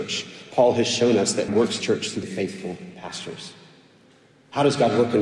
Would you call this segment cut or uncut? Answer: cut